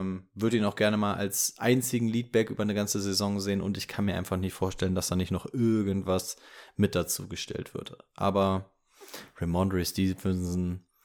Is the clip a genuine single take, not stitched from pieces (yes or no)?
yes